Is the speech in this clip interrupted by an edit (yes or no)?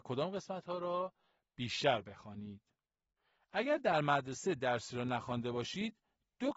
no